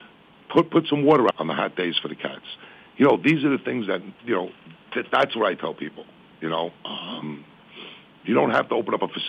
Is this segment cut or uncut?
cut